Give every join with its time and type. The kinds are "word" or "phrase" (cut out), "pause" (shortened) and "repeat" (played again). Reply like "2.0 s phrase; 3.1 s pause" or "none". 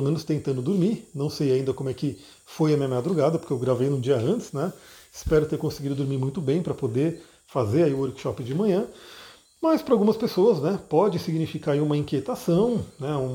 none